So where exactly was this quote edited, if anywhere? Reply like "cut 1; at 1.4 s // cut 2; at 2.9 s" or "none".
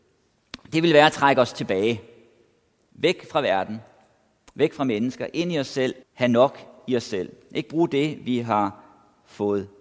cut 1; at 6.0 s